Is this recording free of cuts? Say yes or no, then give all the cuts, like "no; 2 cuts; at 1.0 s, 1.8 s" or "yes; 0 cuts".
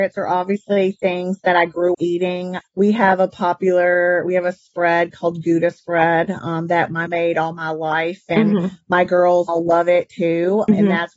no; 3 cuts; at 1.9 s, 7.1 s, 9.5 s